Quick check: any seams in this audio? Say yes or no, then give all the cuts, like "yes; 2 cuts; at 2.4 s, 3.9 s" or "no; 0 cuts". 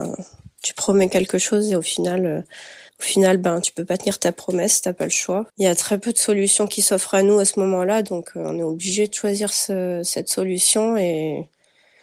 yes; 2 cuts; at 2.9 s, 5.5 s